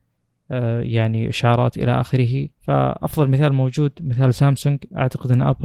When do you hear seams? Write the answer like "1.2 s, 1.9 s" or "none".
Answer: 2.5 s